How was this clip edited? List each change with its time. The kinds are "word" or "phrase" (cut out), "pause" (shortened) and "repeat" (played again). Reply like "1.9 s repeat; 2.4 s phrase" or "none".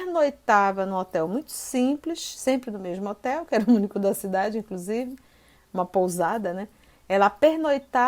none